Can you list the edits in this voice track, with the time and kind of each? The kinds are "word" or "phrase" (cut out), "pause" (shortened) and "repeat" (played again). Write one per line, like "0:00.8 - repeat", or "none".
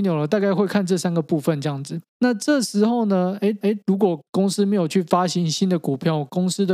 0:02.1 - pause
0:03.6 - repeat
0:04.3 - pause

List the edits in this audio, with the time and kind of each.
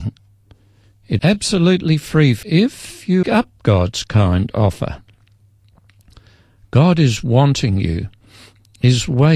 0:01.2 - word
0:02.4 - word
0:03.2 - phrase

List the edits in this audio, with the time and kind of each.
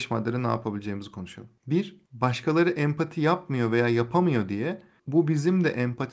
none

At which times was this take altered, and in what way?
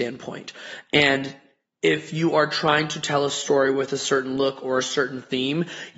none

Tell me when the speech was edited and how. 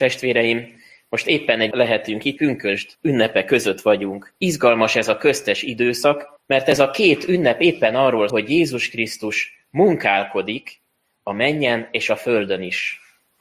0:01.7 - phrase
0:02.4 - phrase
0:02.9 - pause
0:04.4 - pause
0:06.4 - pause
0:08.3 - word

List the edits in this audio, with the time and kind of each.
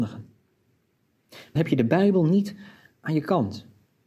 0:01.6 - word

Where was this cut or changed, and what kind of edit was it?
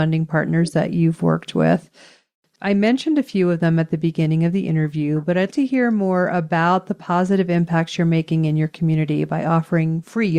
0:05.5 - word

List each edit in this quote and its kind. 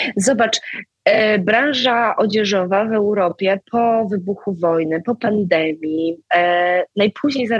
none

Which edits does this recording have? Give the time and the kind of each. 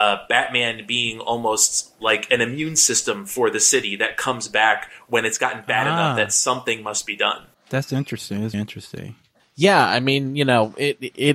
0:08.5 - word
0:09.3 - pause

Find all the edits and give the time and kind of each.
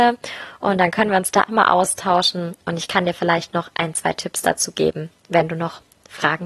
0:01.5 - word

